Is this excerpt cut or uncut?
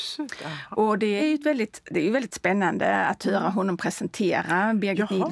cut